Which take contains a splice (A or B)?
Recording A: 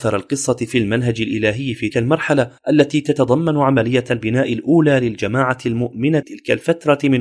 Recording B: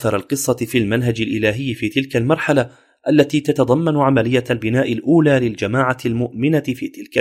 A